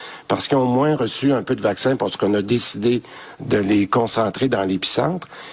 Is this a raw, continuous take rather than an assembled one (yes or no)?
yes